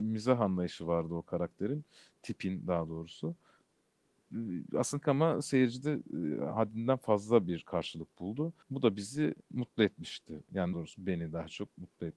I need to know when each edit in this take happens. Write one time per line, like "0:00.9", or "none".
0:05.0
0:08.6
0:09.4
0:10.7